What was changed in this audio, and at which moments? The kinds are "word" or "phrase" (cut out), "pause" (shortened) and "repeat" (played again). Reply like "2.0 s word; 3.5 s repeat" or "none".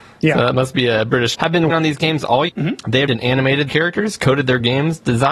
1.3 s word; 1.7 s word; 2.5 s word; 3.1 s word; 3.7 s word

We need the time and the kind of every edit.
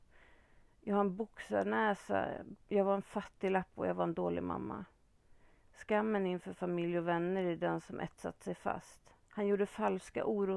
2.6 s pause; 9.2 s pause

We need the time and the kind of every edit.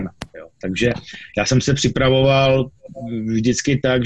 none

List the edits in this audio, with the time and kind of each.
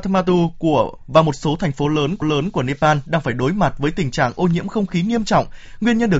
2.2 s repeat

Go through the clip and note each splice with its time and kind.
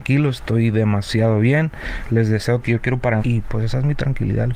2.6 s phrase; 3.2 s word

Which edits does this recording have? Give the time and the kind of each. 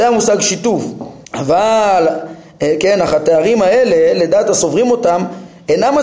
1.2 s pause

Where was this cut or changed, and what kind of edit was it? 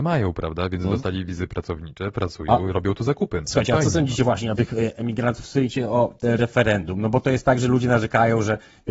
4.6 s word

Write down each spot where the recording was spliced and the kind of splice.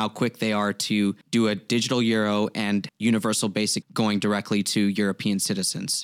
1.2 s pause; 2.9 s word; 3.8 s word

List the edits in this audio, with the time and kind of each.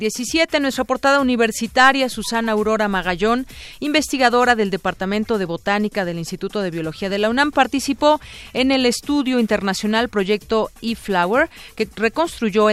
none

